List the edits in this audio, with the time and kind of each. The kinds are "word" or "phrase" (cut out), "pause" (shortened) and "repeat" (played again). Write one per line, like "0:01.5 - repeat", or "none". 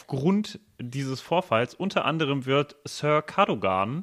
none